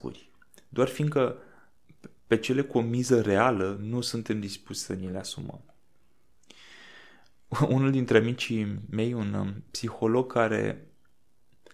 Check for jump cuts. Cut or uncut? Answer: uncut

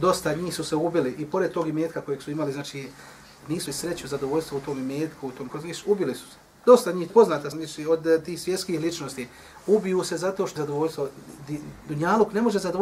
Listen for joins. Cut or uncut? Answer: cut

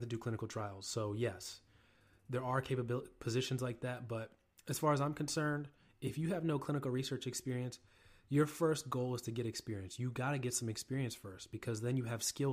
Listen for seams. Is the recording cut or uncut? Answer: uncut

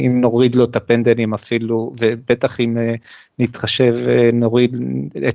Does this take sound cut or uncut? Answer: uncut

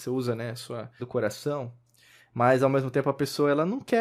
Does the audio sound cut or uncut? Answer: cut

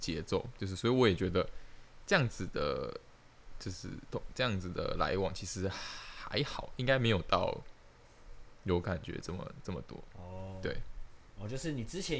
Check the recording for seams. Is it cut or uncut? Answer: uncut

